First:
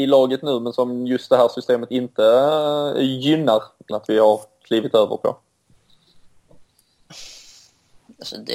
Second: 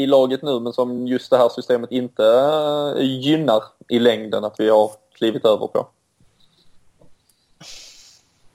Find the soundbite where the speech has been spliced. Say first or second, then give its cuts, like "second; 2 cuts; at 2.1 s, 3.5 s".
first; 1 cut; at 3.9 s